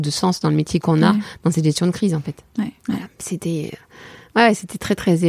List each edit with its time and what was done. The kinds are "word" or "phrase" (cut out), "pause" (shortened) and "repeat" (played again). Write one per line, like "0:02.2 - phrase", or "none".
0:02.8 - pause